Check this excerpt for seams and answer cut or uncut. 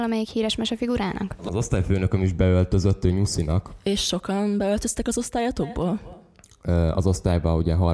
uncut